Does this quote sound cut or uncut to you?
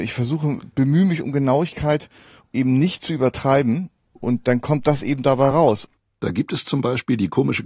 uncut